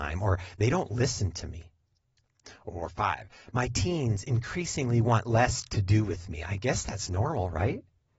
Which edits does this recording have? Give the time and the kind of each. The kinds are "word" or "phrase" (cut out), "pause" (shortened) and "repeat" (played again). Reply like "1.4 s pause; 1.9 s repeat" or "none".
none